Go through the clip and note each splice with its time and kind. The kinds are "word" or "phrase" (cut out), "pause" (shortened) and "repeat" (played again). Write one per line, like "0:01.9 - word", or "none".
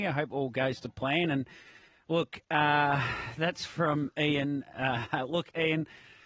none